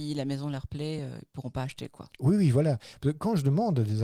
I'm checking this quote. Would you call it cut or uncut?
uncut